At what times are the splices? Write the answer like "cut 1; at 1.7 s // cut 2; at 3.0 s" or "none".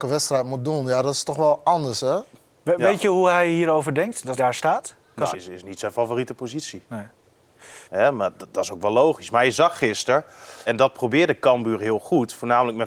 cut 1; at 4.4 s // cut 2; at 5.3 s // cut 3; at 7.8 s // cut 4; at 10.7 s

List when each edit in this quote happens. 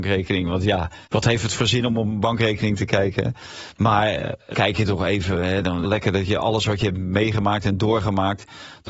cut 1; at 1.1 s // cut 2; at 4.5 s // cut 3; at 5.8 s

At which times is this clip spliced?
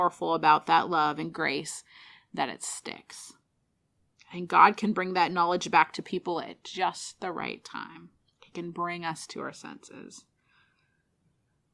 none

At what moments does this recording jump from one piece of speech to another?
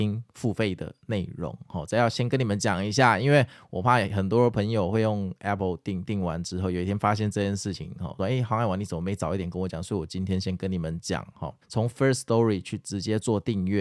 cut 1; at 8.2 s // cut 2; at 11.6 s

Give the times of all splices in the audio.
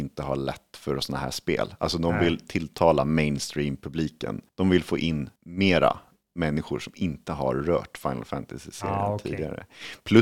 cut 1; at 4.5 s // cut 2; at 5.4 s

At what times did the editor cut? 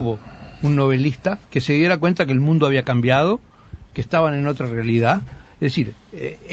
cut 1; at 1.4 s

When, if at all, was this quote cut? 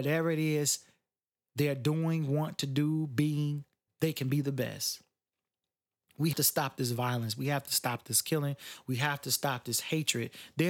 cut 1; at 3.9 s // cut 2; at 6.3 s

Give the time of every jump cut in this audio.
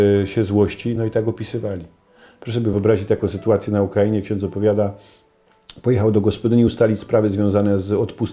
none

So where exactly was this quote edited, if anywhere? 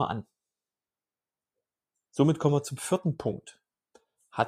none

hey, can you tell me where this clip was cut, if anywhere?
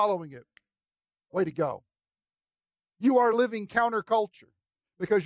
none

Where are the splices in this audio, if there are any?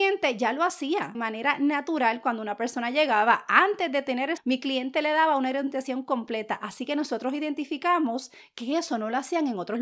cut 1; at 1.1 s // cut 2; at 4.4 s

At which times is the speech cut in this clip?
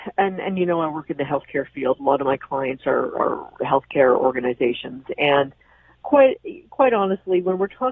none

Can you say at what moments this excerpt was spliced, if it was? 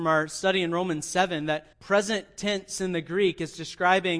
cut 1; at 1.7 s

